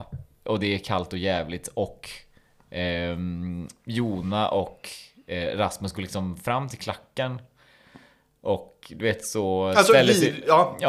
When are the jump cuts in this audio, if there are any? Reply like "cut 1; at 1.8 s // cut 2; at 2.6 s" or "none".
none